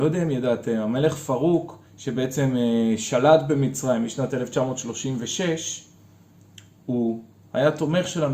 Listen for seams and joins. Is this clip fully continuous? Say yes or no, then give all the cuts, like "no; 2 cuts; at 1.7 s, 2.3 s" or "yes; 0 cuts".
no; 1 cut; at 1.9 s